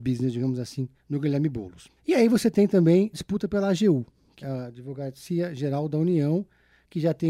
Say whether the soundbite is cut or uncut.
cut